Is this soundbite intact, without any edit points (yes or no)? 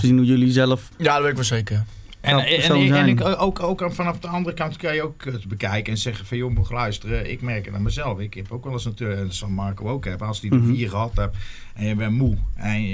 yes